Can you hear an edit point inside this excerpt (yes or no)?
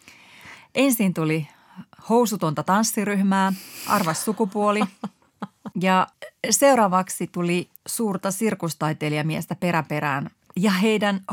yes